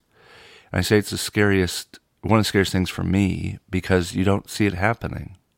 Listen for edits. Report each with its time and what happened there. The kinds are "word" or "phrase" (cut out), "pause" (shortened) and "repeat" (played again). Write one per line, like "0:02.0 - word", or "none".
none

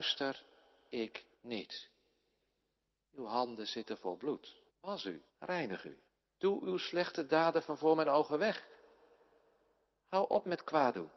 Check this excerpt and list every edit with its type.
0:01.3 - pause
0:04.7 - pause
0:05.3 - pause
0:06.1 - pause

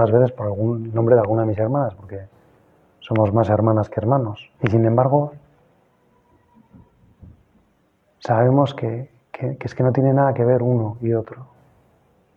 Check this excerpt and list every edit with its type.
0:04.5 - pause

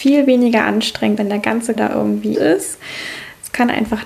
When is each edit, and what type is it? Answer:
0:01.2 - word
0:01.8 - word
0:02.3 - word

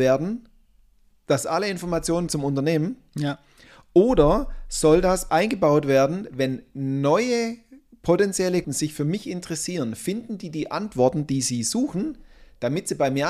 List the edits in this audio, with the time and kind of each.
0:02.3 - word
0:05.3 - word
0:08.6 - word

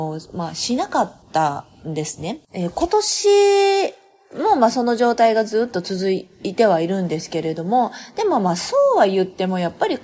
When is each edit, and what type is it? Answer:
0:01.2 - pause
0:02.4 - pause

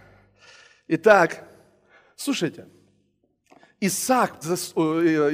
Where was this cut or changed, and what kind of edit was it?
0:04.4 - word

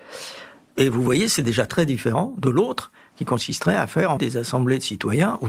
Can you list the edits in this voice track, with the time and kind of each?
0:01.7 - word
0:04.2 - word

